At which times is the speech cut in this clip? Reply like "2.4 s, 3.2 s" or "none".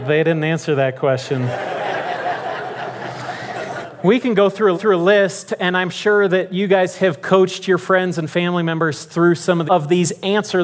4.7 s, 9.7 s